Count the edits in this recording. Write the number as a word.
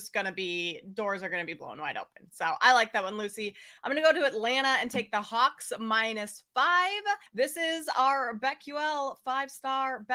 one